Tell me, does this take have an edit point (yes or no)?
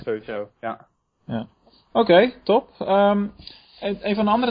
no